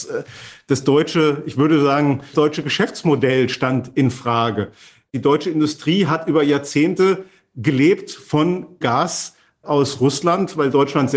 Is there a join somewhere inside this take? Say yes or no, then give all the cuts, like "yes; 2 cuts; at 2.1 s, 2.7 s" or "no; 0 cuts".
yes; 2 cuts; at 2.3 s, 8.8 s